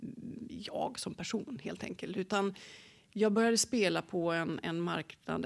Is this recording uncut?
yes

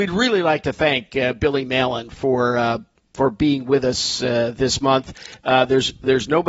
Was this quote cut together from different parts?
no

